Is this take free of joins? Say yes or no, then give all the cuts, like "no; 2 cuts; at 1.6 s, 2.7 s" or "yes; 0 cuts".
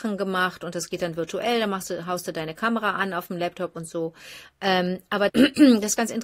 no; 1 cut; at 5.3 s